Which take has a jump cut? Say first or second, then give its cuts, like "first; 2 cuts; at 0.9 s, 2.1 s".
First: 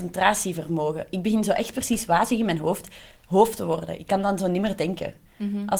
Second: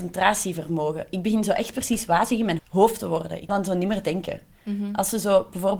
second; 2 cuts; at 2.6 s, 3.5 s